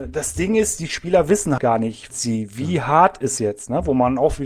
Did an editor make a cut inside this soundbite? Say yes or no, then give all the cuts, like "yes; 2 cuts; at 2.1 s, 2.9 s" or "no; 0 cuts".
yes; 3 cuts; at 1.6 s, 2.1 s, 3.4 s